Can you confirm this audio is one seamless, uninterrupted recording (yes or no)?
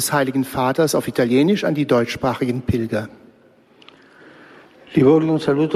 yes